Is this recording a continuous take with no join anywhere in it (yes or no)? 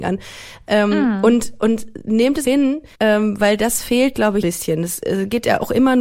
no